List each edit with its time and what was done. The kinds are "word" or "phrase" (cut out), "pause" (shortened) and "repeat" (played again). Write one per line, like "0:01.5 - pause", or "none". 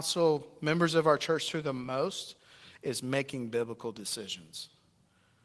none